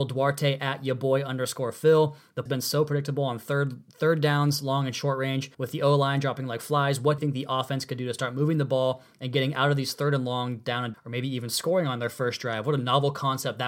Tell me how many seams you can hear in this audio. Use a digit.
4